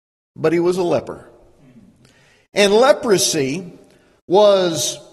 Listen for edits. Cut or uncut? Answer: uncut